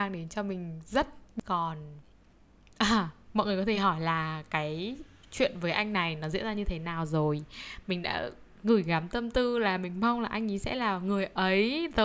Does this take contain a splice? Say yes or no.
no